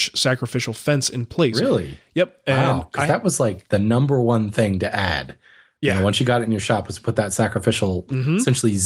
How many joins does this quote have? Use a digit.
0